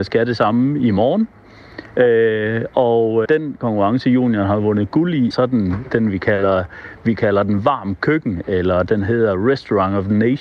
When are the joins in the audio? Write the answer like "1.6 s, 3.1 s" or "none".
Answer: 3.2 s, 5.3 s